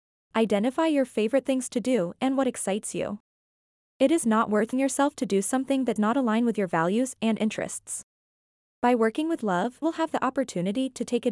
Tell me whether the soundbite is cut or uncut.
cut